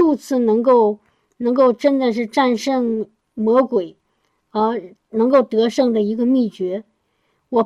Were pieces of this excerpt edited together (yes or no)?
no